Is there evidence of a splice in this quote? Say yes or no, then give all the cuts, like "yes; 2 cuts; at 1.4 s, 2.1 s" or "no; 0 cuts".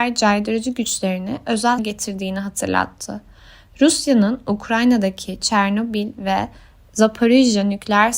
yes; 1 cut; at 1.8 s